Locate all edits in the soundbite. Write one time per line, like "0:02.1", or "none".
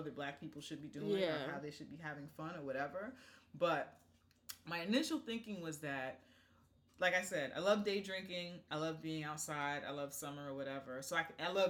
none